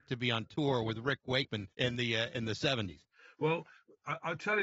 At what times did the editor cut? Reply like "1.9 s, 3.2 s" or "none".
1.7 s